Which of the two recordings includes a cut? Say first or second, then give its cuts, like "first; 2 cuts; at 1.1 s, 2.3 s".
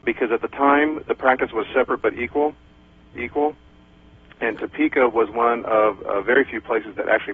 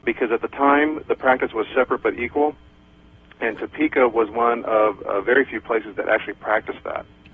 first; 1 cut; at 3.2 s